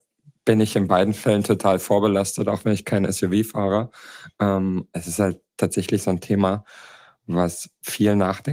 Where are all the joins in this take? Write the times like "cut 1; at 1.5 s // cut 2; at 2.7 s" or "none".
cut 1; at 4.9 s